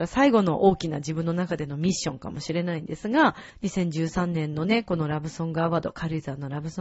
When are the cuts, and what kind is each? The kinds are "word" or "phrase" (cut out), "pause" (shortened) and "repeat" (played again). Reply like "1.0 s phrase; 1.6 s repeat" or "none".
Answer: 3.5 s pause